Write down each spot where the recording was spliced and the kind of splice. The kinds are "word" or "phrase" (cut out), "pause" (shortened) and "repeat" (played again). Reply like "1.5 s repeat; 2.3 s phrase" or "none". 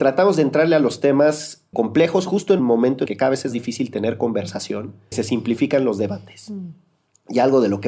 1.7 s word; 2.6 s word; 3.1 s word; 3.5 s word; 5.1 s word